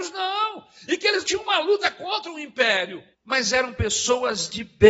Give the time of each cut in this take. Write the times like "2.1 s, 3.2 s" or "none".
1.2 s, 3.1 s